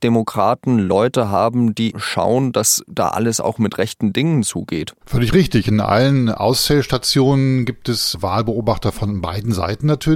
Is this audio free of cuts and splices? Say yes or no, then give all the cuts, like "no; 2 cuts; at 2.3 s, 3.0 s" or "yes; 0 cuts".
no; 1 cut; at 5.0 s